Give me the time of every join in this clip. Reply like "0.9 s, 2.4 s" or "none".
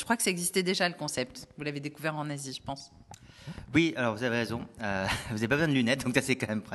none